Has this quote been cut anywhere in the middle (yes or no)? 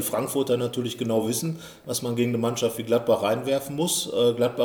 no